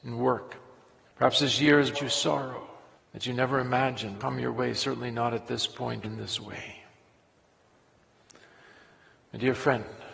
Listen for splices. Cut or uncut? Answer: cut